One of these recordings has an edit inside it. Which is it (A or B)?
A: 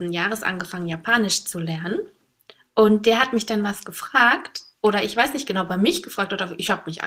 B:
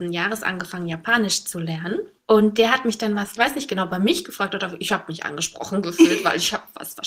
B